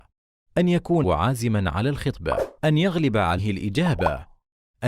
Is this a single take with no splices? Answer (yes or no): no